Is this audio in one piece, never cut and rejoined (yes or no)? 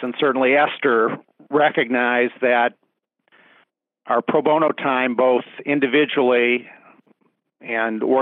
yes